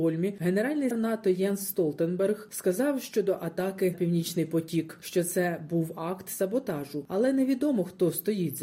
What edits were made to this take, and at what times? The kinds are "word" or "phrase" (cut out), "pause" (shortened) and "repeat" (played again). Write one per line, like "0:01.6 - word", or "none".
0:00.9 - word
0:03.9 - word